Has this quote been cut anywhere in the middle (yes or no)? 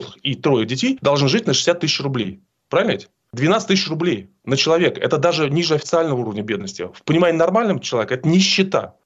no